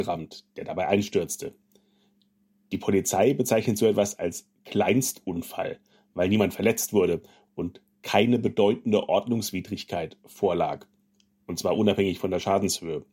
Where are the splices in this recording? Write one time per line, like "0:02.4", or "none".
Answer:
none

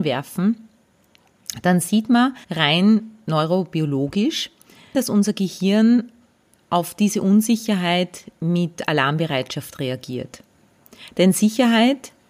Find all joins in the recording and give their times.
0:02.4

